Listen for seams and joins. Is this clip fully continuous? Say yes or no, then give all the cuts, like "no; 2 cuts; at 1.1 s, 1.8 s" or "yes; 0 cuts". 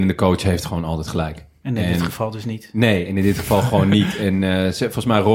yes; 0 cuts